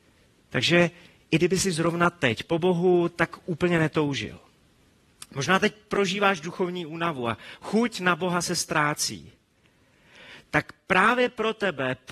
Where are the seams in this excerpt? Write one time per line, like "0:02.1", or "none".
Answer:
none